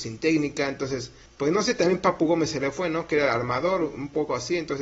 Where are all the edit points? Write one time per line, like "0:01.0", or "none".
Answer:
0:01.3